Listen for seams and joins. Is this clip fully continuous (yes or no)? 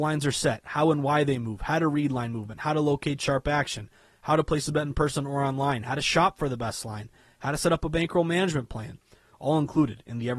yes